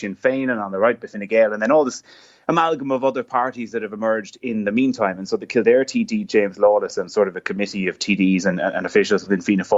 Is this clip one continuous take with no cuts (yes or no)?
yes